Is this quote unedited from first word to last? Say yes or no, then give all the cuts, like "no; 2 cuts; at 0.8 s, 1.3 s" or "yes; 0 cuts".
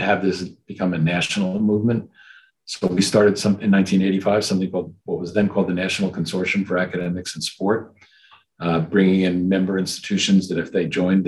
yes; 0 cuts